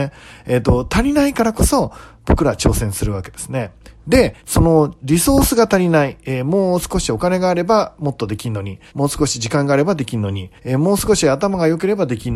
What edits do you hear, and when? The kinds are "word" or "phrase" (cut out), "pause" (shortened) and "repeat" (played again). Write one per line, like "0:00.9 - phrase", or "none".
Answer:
0:04.4 - pause
0:08.9 - pause
0:10.6 - pause